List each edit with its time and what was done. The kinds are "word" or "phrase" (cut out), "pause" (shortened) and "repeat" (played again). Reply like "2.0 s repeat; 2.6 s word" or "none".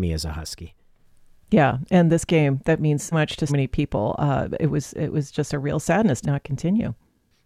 3.1 s word; 3.5 s word; 6.2 s phrase